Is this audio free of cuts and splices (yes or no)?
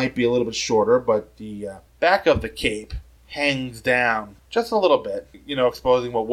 yes